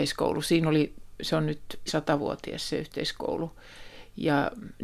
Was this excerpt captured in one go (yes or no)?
no